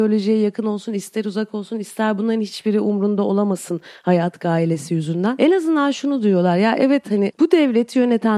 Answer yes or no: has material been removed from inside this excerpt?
no